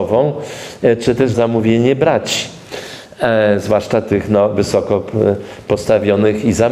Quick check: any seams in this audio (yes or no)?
yes